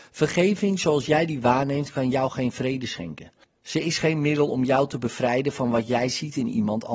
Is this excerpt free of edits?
yes; 0 cuts

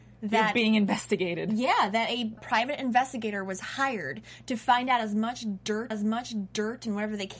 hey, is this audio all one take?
no; 2 cuts; at 2.4 s, 5.9 s

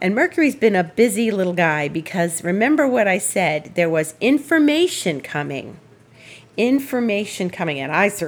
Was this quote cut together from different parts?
no; 0 cuts

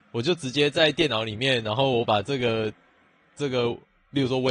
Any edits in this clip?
no; 0 cuts

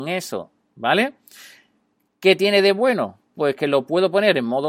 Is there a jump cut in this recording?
no; 0 cuts

